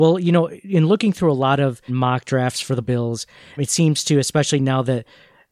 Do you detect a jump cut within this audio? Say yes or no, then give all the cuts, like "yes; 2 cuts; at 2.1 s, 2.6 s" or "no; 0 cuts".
yes; 3 cuts; at 1.9 s, 2.8 s, 3.6 s